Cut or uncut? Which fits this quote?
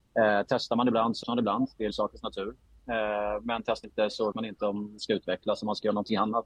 cut